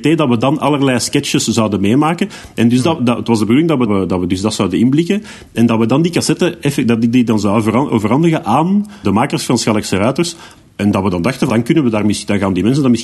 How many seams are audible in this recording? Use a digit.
4